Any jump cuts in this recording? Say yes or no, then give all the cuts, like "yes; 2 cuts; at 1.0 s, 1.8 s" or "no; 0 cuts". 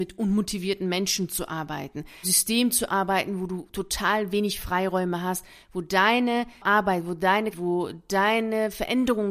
yes; 2 cuts; at 2.2 s, 7.5 s